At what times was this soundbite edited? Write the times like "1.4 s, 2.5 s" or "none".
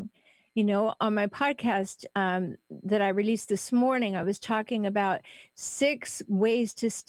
none